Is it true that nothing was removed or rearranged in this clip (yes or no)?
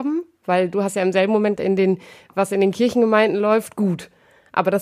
no